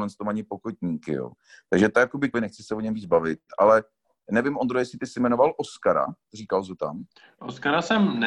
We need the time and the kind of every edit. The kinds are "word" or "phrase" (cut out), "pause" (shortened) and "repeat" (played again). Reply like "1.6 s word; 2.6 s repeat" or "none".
2.3 s word